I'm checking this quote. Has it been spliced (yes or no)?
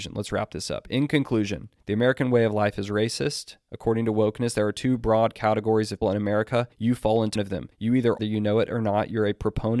yes